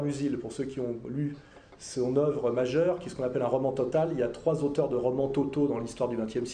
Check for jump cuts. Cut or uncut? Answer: uncut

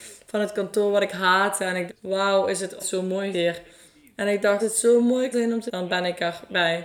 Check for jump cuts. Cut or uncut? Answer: cut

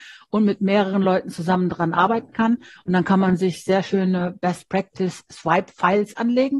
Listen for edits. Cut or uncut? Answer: uncut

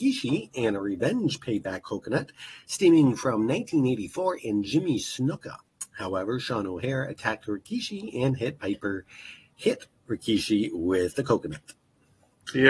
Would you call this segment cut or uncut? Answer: uncut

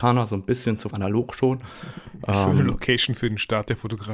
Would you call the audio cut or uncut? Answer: cut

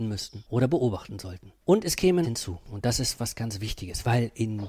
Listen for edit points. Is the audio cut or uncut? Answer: cut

